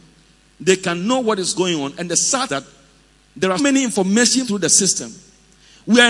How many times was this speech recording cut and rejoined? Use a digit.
3